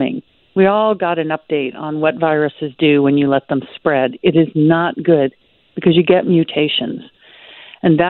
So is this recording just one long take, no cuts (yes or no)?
yes